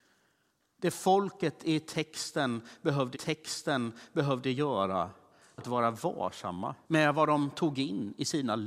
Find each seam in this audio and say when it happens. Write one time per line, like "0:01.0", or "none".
0:03.1
0:05.6
0:06.8